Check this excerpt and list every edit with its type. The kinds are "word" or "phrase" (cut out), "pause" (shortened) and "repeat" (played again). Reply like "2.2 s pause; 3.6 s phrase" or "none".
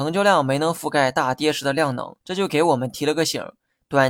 2.2 s pause